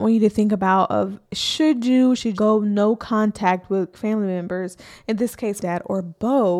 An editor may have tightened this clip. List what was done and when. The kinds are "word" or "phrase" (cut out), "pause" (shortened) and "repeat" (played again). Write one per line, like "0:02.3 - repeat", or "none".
0:01.2 - pause
0:02.4 - phrase
0:03.9 - word
0:05.6 - word